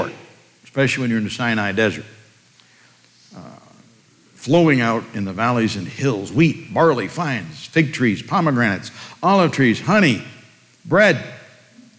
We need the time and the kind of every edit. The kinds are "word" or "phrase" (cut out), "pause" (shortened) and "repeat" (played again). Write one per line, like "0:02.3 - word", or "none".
none

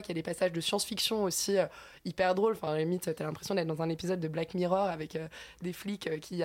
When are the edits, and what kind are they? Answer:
none

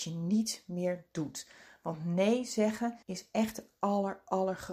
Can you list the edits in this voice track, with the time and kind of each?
0:03.0 - pause

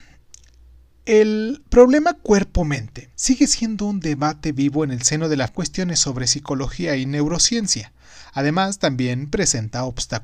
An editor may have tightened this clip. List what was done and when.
0:03.1 - pause
0:05.5 - phrase

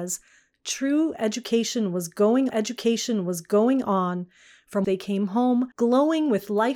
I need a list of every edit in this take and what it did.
0:02.5 - repeat
0:04.8 - word
0:05.7 - pause

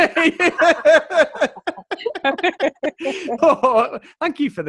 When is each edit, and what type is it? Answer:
0:03.4 - word

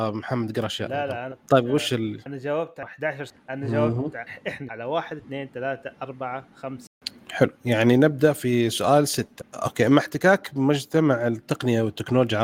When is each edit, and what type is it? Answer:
none

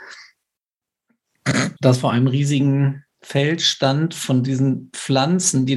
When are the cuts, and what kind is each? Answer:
0:01.8 - pause
0:03.1 - pause

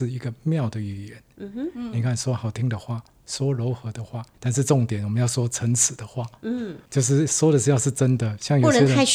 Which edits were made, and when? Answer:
0:04.3 - pause
0:06.8 - pause

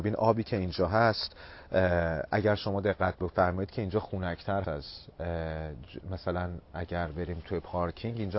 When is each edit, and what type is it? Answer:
0:04.6 - word

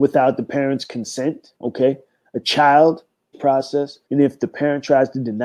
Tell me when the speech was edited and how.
0:01.6 - pause
0:03.3 - phrase
0:04.0 - pause

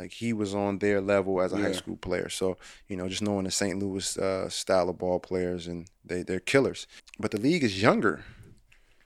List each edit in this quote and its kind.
0:07.0 - pause

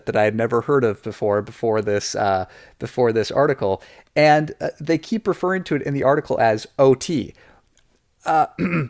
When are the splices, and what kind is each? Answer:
none

